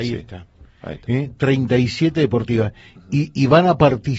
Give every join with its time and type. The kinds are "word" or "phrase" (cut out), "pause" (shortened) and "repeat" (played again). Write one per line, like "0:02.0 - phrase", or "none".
none